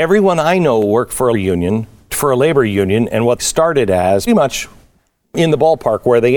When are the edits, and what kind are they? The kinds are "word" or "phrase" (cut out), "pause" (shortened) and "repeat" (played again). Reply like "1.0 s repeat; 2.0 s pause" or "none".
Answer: 1.3 s word; 2.1 s word; 3.4 s word; 4.3 s word